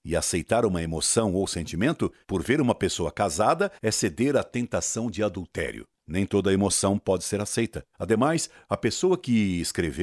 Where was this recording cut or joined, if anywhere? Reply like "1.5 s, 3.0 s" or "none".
2.2 s, 3.8 s, 5.9 s, 7.9 s